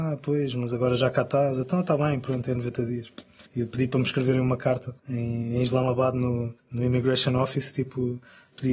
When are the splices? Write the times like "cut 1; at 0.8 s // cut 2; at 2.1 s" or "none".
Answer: cut 1; at 3.5 s // cut 2; at 5.0 s // cut 3; at 6.6 s